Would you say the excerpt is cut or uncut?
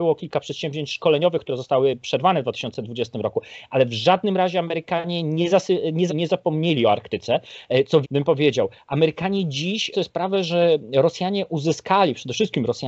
cut